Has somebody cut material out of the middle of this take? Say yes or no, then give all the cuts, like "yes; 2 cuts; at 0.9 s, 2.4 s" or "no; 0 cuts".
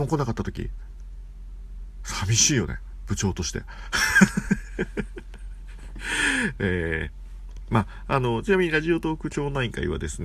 no; 0 cuts